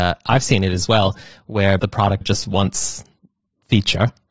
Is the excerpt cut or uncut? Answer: cut